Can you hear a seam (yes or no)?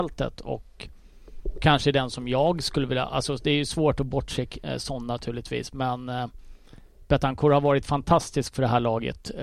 no